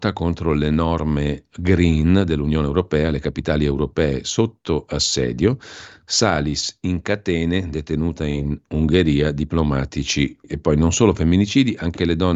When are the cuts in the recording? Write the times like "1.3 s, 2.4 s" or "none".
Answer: 10.4 s